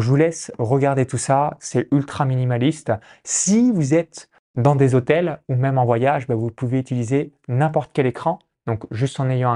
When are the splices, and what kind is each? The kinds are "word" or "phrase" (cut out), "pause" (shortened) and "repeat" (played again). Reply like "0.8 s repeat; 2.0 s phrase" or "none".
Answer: none

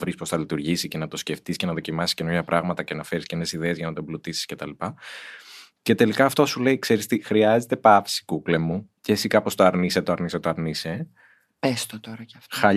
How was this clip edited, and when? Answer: 9.0 s pause

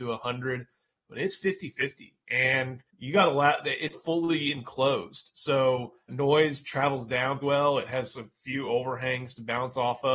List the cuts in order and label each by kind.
2.9 s pause; 3.9 s word; 6.1 s word; 7.4 s word

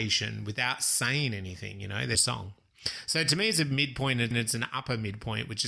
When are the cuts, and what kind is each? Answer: 2.1 s phrase; 4.3 s repeat

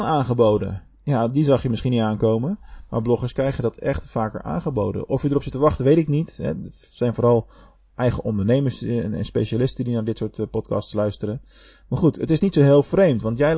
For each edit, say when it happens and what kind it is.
none

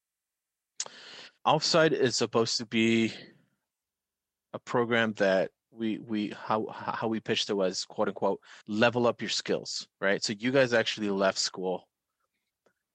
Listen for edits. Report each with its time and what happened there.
1.4 s pause; 5.6 s pause; 8.6 s pause

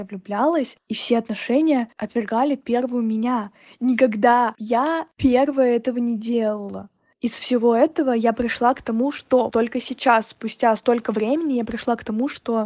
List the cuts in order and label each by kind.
9.5 s word

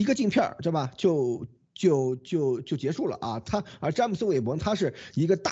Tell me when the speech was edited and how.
none

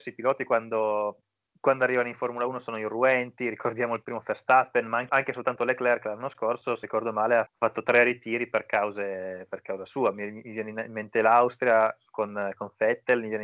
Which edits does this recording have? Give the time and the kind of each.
5.1 s word; 6.8 s word; 7.5 s word

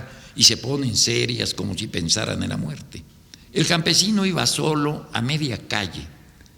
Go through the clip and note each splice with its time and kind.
3.4 s pause

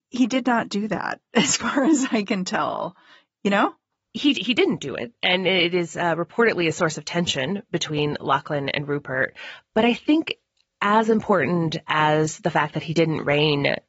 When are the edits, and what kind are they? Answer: none

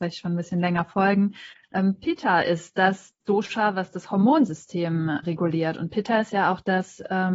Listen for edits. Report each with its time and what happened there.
5.2 s word

